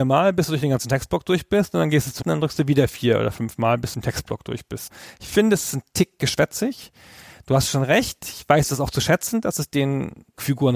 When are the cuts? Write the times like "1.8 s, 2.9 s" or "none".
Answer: 2.2 s, 3.9 s